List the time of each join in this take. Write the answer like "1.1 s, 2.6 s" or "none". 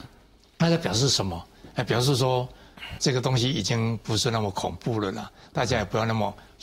3.0 s